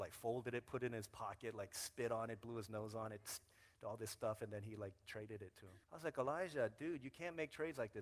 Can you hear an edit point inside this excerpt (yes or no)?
yes